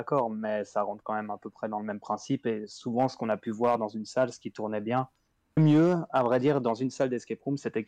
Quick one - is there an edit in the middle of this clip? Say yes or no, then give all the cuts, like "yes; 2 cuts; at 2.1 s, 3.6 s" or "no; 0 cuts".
yes; 1 cut; at 5.6 s